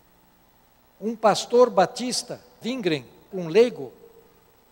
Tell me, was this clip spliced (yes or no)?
yes